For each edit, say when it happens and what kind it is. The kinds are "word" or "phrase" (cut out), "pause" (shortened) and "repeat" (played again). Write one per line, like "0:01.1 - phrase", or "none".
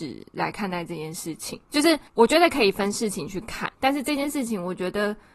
0:01.6 - pause
0:02.1 - pause
0:03.7 - pause

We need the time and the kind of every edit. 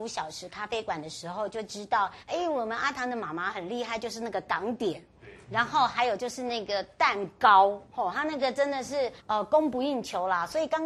0:02.2 - pause
0:07.8 - pause
0:09.2 - pause

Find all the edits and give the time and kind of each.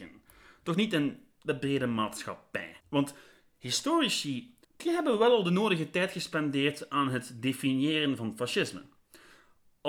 0:02.8 - pause
0:04.6 - pause

